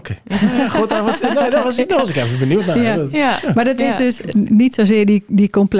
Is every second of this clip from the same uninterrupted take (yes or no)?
yes